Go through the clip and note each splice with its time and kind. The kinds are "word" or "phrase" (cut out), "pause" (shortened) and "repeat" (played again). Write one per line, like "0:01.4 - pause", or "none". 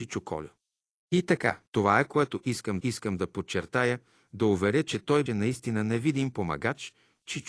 0:01.7 - pause
0:02.8 - repeat
0:05.3 - word